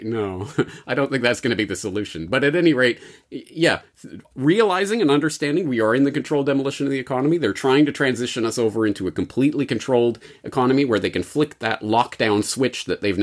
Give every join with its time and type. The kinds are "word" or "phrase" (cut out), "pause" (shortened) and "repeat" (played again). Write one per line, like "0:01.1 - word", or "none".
0:04.2 - pause